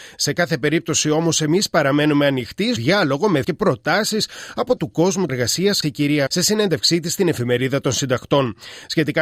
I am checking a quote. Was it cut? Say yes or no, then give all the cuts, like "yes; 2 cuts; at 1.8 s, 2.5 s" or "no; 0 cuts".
yes; 6 cuts; at 2.8 s, 3.4 s, 4.8 s, 5.3 s, 5.8 s, 6.3 s